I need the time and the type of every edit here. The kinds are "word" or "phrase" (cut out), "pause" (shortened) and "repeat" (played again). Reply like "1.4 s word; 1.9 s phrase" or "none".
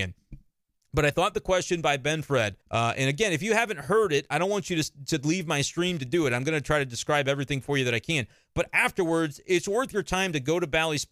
2.6 s pause